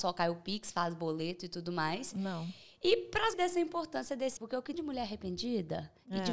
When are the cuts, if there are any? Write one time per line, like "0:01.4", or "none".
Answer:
0:03.3
0:04.4
0:04.7